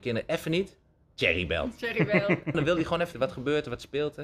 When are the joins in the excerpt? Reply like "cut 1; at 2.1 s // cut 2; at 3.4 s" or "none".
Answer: cut 1; at 2.5 s // cut 2; at 3.1 s